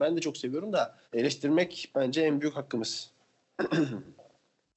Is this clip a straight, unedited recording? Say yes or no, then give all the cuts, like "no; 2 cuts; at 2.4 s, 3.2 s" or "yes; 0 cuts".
no; 1 cut; at 1.0 s